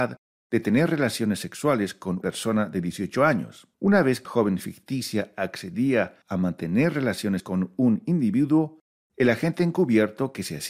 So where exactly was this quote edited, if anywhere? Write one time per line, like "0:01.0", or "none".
0:02.2
0:03.7
0:04.2
0:06.2
0:07.4